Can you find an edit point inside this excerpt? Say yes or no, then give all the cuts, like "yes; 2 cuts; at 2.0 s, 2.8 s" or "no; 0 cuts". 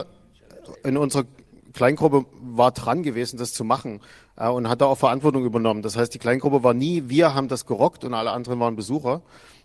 no; 0 cuts